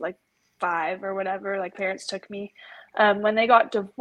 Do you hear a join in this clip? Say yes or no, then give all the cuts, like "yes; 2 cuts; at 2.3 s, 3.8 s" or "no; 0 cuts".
yes; 1 cut; at 1.7 s